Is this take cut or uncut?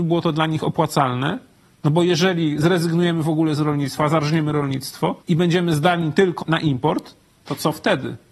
cut